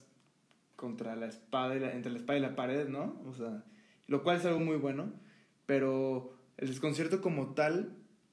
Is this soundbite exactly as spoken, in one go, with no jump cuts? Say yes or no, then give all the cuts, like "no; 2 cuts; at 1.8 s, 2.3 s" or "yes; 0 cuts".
yes; 0 cuts